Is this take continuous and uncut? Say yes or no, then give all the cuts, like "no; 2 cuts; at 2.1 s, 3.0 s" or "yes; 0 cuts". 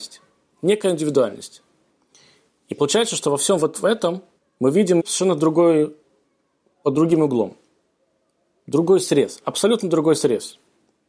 no; 2 cuts; at 4.4 s, 5.0 s